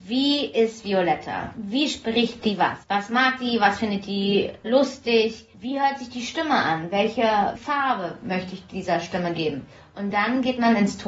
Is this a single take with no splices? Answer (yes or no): yes